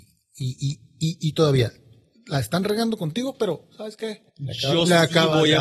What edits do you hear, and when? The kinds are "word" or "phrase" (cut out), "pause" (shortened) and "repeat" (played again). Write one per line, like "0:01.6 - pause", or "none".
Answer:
0:04.3 - pause